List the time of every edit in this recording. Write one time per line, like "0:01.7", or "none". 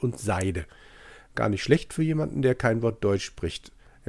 none